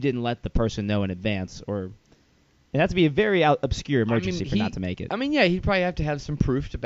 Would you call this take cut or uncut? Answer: uncut